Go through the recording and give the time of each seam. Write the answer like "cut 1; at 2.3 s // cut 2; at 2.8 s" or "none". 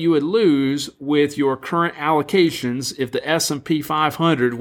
none